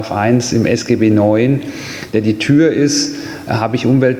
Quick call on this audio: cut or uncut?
uncut